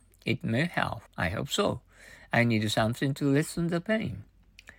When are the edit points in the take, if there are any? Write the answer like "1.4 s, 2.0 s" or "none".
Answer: 1.1 s